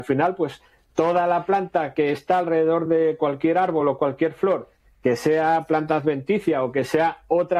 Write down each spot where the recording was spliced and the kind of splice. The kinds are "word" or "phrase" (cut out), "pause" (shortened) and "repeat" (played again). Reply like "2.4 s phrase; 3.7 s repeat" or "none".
none